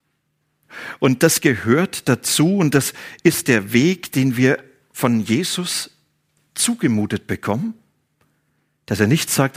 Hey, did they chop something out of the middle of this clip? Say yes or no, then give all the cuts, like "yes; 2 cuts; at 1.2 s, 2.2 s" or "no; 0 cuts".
no; 0 cuts